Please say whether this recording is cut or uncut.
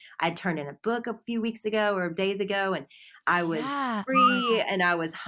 uncut